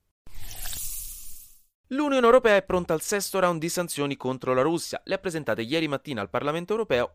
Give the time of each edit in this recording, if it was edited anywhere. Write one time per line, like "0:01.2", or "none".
none